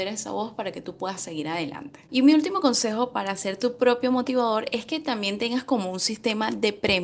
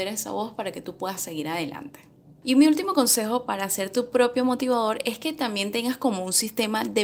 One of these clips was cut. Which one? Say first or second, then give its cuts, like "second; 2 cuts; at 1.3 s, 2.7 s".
first; 1 cut; at 2.1 s